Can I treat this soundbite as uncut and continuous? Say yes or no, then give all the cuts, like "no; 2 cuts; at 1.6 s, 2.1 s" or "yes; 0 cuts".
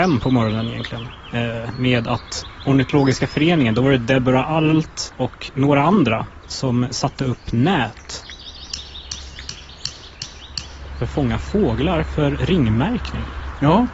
yes; 0 cuts